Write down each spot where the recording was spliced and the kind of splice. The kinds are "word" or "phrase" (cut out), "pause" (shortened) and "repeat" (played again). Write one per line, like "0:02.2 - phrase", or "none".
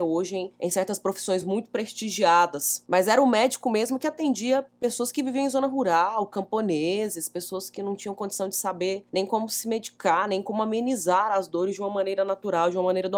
none